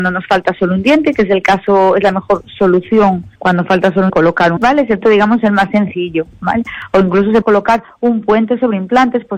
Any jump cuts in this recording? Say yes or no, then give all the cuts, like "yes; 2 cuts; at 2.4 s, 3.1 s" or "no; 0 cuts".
yes; 5 cuts; at 3.4 s, 4.1 s, 4.6 s, 5.0 s, 7.4 s